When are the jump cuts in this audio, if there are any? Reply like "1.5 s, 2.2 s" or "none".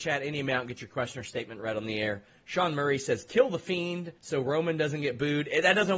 4.2 s